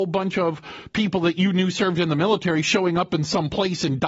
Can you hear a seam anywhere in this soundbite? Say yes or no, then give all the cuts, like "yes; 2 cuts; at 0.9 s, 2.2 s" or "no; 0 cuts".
no; 0 cuts